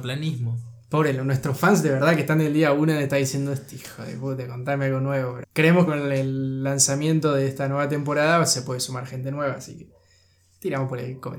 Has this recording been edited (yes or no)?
yes